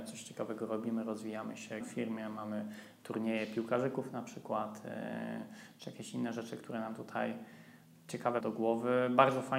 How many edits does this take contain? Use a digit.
2